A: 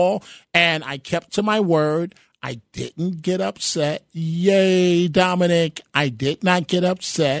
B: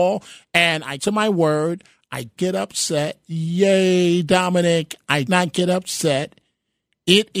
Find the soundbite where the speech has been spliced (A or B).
B